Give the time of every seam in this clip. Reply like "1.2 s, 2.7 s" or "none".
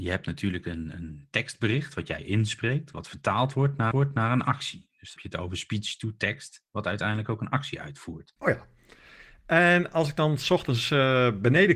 3.9 s, 5.2 s, 8.4 s